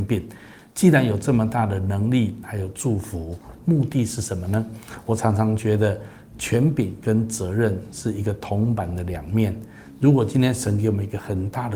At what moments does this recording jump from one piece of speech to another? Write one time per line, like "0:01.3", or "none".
0:02.4